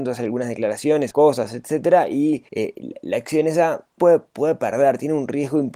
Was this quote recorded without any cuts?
no; 3 cuts; at 1.1 s, 2.5 s, 4.0 s

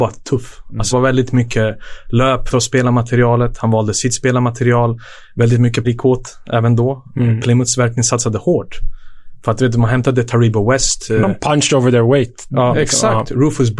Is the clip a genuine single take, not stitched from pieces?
no; 4 cuts; at 0.9 s, 2.5 s, 5.8 s, 12.7 s

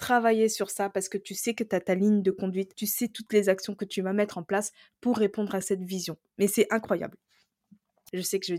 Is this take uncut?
yes; 0 cuts

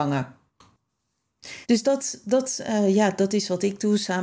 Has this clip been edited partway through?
yes; 1 cut; at 1.6 s

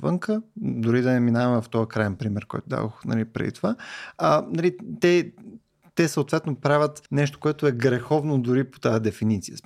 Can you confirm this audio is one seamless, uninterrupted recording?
no; 1 cut; at 7.1 s

